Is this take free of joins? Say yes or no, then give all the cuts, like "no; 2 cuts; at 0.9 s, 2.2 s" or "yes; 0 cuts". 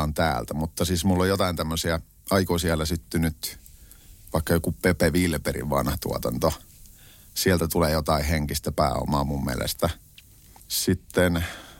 yes; 0 cuts